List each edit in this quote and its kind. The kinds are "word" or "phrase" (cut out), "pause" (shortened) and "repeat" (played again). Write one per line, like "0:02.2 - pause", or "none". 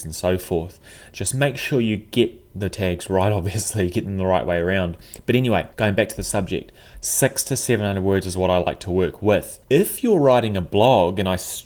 0:05.7 - pause
0:09.6 - pause